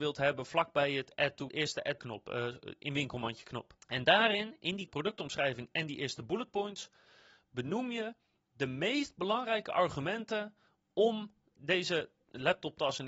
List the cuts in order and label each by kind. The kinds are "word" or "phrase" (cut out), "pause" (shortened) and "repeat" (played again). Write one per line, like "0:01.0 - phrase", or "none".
0:01.5 - word
0:02.0 - phrase
0:03.8 - pause
0:04.9 - word